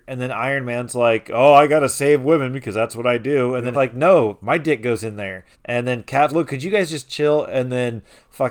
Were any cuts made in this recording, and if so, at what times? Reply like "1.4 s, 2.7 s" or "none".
3.7 s, 5.5 s, 6.3 s

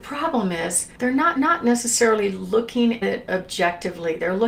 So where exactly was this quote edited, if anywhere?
0.9 s, 1.4 s, 3.0 s

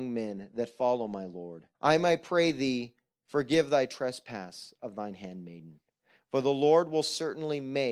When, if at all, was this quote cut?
1.7 s

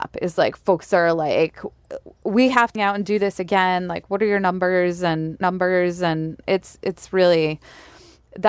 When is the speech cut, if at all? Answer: 2.8 s, 5.4 s

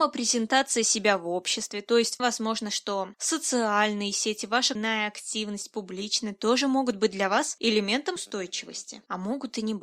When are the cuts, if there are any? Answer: 2.2 s, 4.8 s, 8.2 s

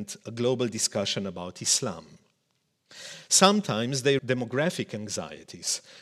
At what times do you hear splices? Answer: 4.2 s

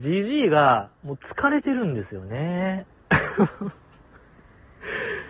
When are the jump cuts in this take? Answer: 0.9 s

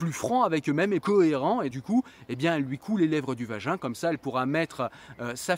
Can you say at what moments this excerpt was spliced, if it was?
1.0 s, 1.7 s

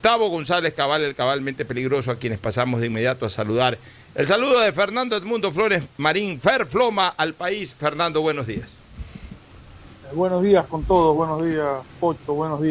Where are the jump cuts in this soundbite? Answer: none

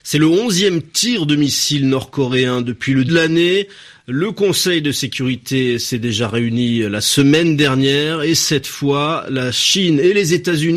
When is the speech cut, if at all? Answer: 3.1 s

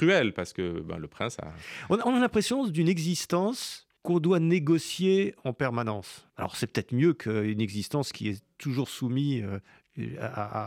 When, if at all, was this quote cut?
4.0 s, 6.3 s

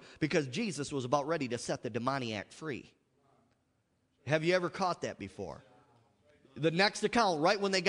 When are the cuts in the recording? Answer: none

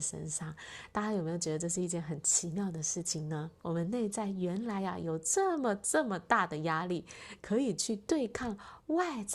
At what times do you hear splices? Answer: 3.6 s

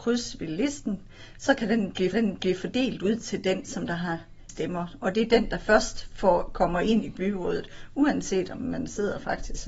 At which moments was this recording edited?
2.1 s, 4.5 s

